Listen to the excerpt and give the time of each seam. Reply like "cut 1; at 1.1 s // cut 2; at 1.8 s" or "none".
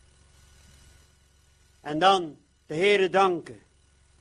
none